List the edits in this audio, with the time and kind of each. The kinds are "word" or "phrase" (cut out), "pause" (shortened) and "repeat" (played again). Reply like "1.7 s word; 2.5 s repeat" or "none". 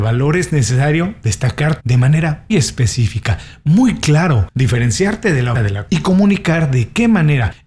1.8 s phrase; 2.5 s word; 5.5 s word; 5.9 s word

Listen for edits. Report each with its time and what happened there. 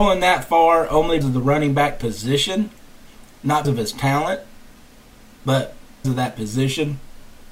1.2 s word; 3.6 s word; 6.0 s word

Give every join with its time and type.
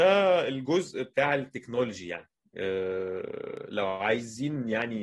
none

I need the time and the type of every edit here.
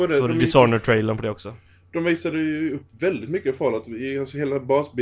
none

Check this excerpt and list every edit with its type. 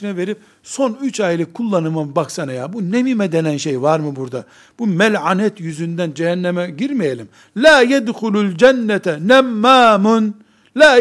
none

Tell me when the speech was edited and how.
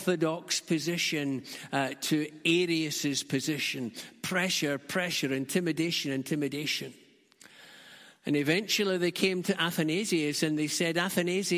none

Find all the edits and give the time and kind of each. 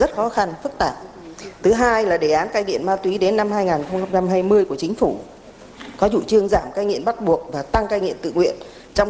none

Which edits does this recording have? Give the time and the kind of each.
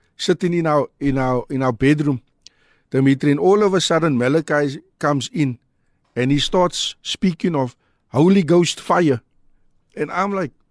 none

